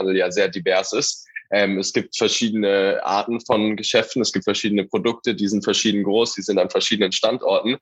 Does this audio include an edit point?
no; 0 cuts

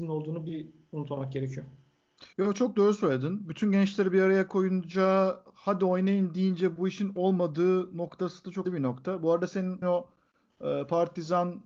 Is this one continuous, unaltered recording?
no; 3 cuts; at 2.3 s, 8.6 s, 9.8 s

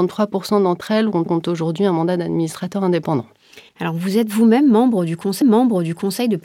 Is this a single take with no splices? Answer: no; 3 cuts; at 1.3 s, 3.7 s, 5.4 s

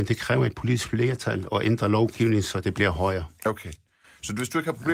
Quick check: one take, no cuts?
yes; 0 cuts

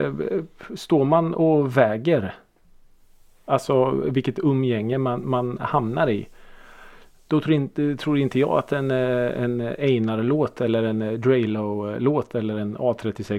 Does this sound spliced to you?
no; 0 cuts

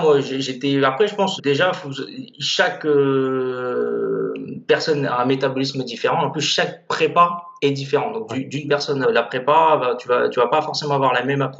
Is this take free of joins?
no; 3 cuts; at 1.4 s, 7.6 s, 9.0 s

